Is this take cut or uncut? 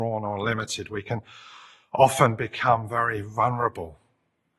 uncut